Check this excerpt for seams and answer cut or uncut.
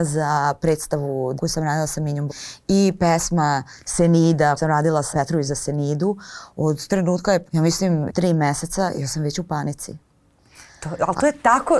cut